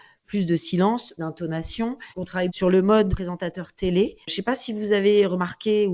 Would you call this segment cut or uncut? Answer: cut